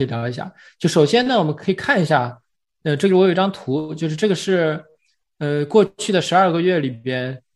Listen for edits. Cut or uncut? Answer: uncut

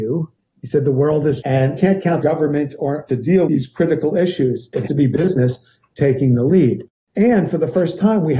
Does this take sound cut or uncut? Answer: cut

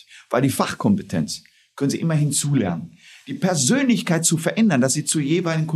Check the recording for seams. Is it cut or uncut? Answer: uncut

